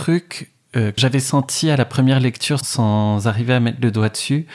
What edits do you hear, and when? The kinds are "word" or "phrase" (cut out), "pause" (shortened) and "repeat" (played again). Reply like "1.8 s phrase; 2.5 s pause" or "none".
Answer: 1.0 s word; 2.6 s word